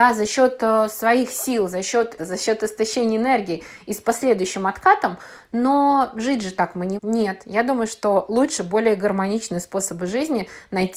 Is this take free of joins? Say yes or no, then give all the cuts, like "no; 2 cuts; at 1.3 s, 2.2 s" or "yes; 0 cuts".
no; 2 cuts; at 2.2 s, 7.0 s